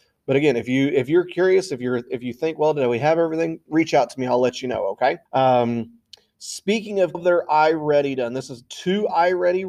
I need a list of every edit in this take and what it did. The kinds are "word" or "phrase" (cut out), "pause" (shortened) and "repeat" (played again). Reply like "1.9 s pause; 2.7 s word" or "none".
5.3 s pause; 7.1 s phrase